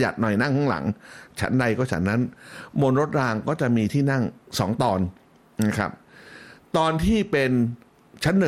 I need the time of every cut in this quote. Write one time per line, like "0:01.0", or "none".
none

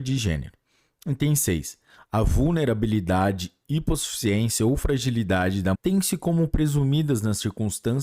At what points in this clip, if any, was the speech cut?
0:05.7

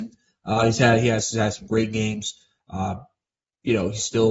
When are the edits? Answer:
none

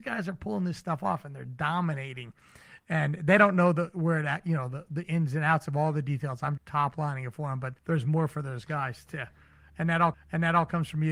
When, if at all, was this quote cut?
0:06.6
0:07.8
0:10.1

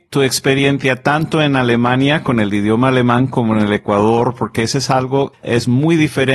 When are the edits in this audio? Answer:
0:05.3

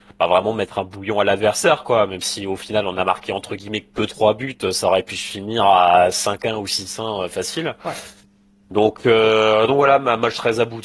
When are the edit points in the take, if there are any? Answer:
none

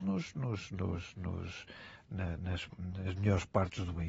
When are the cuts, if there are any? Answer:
none

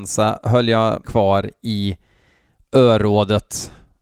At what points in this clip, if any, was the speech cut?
0:01.0

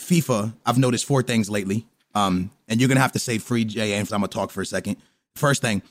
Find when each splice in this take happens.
0:04.1

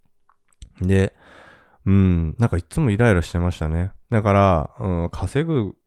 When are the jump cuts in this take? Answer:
0:04.0

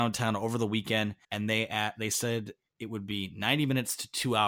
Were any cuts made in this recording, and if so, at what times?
0:01.2

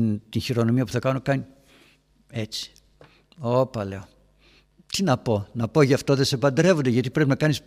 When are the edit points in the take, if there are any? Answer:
none

